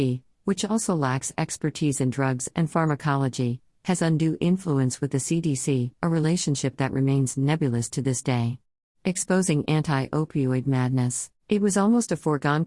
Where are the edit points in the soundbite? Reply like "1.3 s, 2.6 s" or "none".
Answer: 5.9 s, 8.8 s, 11.4 s